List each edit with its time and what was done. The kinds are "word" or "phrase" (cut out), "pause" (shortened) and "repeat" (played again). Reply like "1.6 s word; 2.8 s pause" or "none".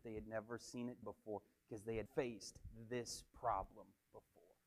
1.0 s word; 2.1 s word